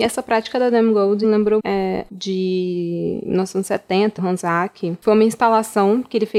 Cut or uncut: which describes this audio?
cut